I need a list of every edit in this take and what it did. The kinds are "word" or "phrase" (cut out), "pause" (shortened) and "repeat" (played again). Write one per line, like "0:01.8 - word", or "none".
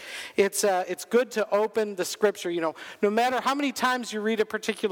none

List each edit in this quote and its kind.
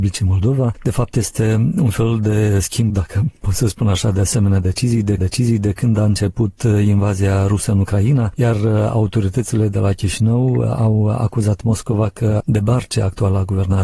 0:02.9 - word
0:05.2 - repeat
0:12.4 - phrase

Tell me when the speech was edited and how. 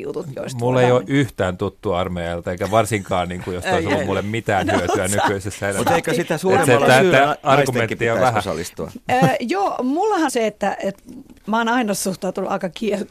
0:10.3 - word
0:11.4 - word

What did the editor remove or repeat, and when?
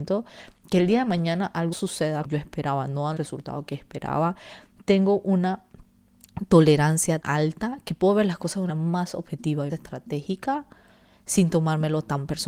0:01.7 - word
0:02.2 - word
0:03.2 - word
0:07.2 - word
0:08.7 - word
0:09.7 - word

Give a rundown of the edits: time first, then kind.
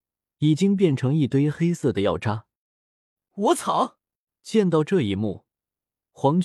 0:04.3 - pause

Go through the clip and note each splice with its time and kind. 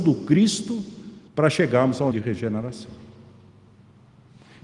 0:01.3 - pause
0:02.1 - word

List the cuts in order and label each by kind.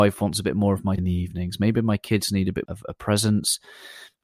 0:01.0 - word
0:02.6 - word

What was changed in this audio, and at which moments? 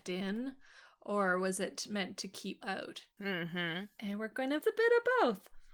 0:02.6 - word
0:03.1 - pause
0:04.6 - phrase

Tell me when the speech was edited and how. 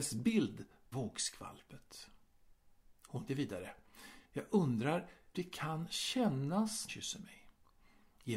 0:00.9 - phrase
0:03.3 - word
0:04.2 - pause
0:05.3 - word
0:06.9 - phrase

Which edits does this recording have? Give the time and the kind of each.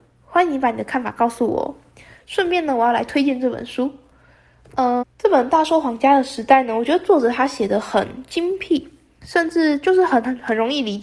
0:05.0 - word

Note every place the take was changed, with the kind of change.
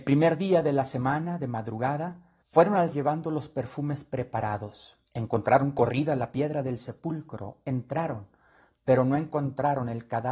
0:02.4 - pause
0:02.9 - word
0:05.1 - pause

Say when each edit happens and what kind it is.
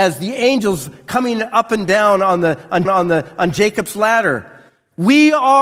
0:02.8 - repeat

